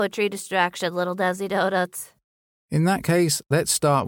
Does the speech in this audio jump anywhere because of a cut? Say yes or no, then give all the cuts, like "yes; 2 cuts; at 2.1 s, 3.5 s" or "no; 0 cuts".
no; 0 cuts